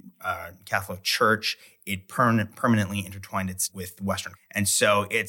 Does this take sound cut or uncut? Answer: cut